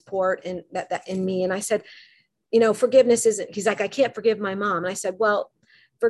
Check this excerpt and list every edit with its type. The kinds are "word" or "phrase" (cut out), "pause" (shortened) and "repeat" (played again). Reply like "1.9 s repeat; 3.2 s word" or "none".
none